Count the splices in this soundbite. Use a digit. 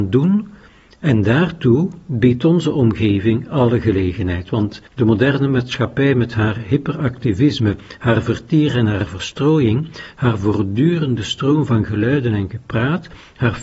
1